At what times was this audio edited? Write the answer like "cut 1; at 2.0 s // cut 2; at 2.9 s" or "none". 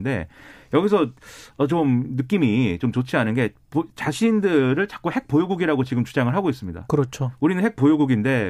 none